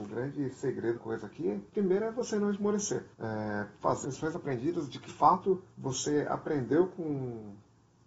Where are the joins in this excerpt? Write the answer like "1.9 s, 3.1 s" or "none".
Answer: 1.0 s, 1.7 s, 3.1 s, 4.0 s, 5.1 s, 5.7 s